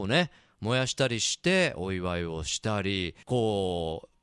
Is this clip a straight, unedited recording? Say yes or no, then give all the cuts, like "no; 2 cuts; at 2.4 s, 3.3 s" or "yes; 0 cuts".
no; 1 cut; at 3.2 s